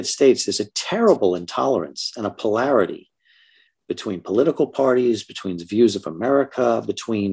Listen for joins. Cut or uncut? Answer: uncut